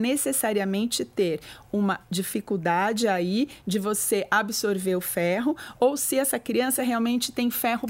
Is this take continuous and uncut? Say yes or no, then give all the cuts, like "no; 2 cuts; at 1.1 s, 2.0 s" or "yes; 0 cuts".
yes; 0 cuts